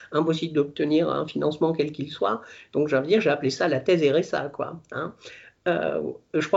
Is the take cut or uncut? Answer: uncut